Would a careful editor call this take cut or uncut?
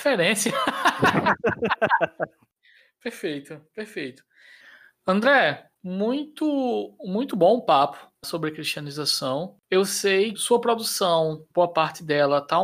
cut